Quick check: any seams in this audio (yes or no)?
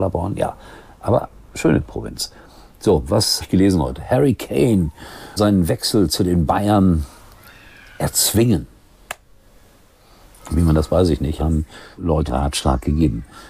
yes